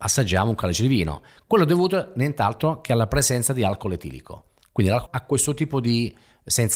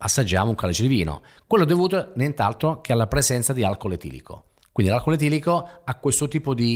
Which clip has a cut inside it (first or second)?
first